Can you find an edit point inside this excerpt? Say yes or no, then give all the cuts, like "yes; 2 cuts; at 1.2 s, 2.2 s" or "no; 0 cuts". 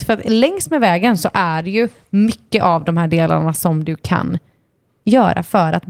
no; 0 cuts